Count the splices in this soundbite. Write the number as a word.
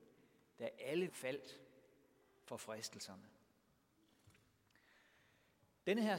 one